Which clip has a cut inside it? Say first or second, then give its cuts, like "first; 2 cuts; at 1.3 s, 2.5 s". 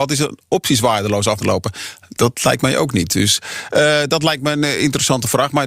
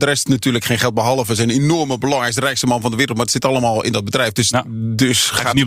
first; 1 cut; at 1.4 s